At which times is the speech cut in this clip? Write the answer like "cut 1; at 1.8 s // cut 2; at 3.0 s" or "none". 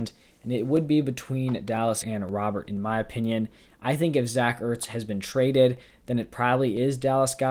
cut 1; at 2.0 s // cut 2; at 2.7 s